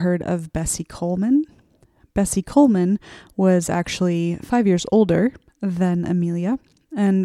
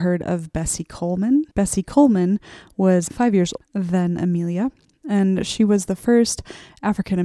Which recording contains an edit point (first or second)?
second